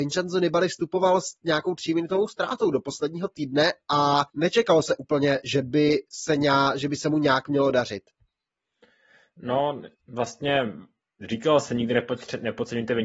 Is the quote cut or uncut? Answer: cut